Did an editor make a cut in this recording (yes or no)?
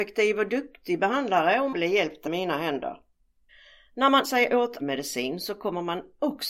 yes